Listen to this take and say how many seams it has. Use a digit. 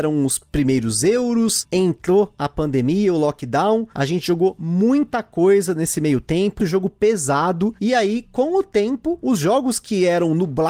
1